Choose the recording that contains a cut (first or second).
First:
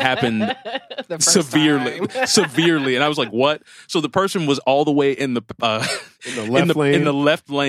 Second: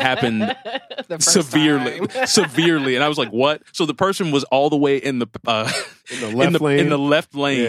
second